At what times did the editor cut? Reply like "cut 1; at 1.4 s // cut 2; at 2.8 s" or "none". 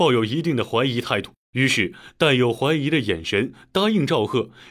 cut 1; at 1.4 s